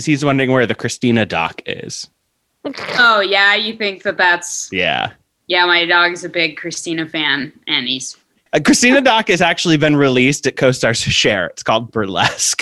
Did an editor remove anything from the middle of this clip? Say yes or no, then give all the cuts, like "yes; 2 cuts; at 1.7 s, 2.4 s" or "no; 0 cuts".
no; 0 cuts